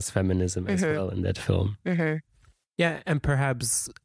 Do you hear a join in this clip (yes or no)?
no